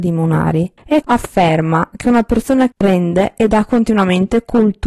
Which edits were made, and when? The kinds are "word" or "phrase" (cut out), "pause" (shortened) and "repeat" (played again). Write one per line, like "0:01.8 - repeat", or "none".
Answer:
0:01.0 - word
0:02.7 - word